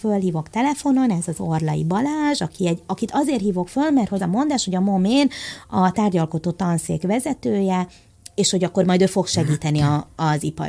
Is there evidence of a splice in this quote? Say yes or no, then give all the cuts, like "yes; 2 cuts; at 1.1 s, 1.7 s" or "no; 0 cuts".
yes; 1 cut; at 4.2 s